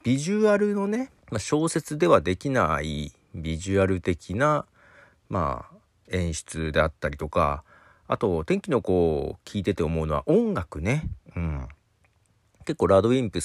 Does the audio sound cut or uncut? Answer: cut